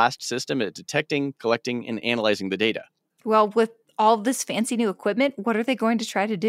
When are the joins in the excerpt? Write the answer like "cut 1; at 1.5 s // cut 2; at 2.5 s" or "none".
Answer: none

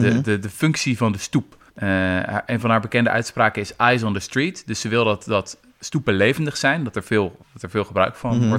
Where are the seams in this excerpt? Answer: cut 1; at 1.7 s // cut 2; at 7.4 s

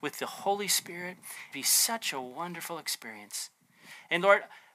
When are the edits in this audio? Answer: cut 1; at 1.5 s

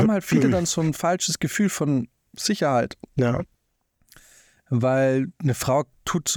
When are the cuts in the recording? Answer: none

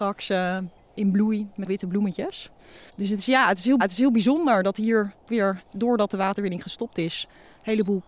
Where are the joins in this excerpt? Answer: cut 1; at 1.7 s // cut 2; at 2.9 s // cut 3; at 3.8 s // cut 4; at 5.3 s

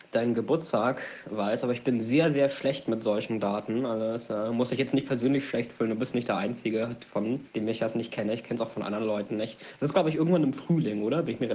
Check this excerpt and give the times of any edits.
cut 1; at 7.5 s

